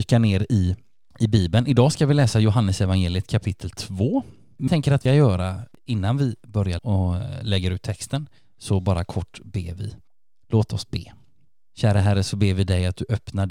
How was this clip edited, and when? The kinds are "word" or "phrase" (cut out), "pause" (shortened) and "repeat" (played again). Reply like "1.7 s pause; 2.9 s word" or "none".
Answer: 4.7 s word; 5.1 s phrase; 6.8 s word

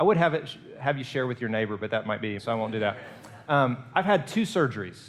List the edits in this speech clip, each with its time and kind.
2.4 s word

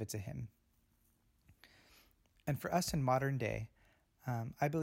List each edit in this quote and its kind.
none

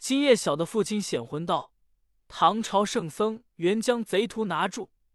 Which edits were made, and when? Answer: 3.5 s pause

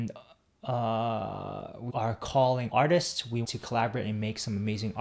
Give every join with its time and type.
1.9 s word; 2.7 s word; 3.4 s word

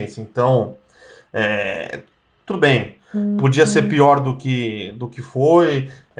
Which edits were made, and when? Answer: none

